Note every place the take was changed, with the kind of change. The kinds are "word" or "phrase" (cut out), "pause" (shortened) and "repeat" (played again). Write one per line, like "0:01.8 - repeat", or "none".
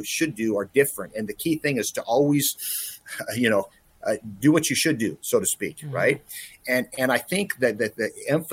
none